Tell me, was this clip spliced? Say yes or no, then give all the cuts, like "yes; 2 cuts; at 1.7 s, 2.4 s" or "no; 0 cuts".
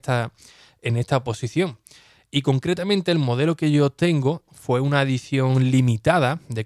no; 0 cuts